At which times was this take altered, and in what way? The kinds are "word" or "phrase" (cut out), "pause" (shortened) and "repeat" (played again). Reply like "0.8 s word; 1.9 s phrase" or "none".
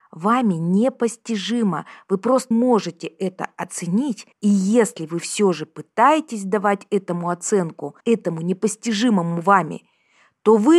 2.5 s word; 4.3 s pause; 8.0 s pause